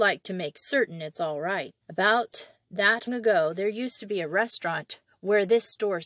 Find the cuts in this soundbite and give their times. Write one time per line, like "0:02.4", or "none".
0:01.8
0:03.1